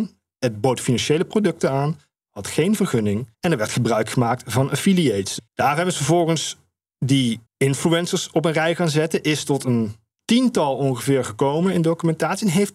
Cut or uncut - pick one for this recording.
cut